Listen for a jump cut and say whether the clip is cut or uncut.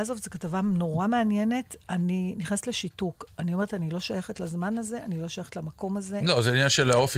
uncut